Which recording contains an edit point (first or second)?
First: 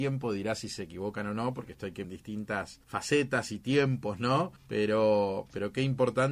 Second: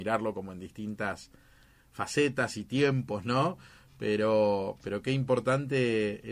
first